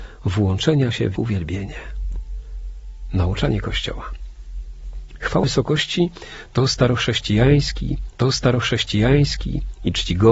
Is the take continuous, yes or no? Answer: no